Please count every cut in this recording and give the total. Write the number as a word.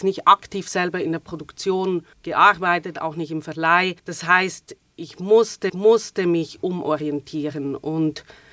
four